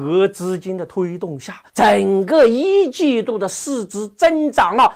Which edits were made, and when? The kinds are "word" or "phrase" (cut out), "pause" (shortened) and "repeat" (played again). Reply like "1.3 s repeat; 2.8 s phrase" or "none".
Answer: 1.7 s pause